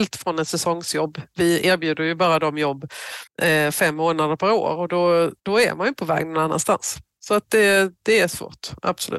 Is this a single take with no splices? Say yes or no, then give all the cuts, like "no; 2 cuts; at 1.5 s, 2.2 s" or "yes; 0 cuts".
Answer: no; 2 cuts; at 3.3 s, 5.4 s